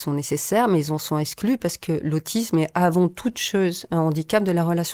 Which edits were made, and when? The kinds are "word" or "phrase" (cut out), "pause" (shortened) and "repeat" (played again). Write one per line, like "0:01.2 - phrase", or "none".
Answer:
none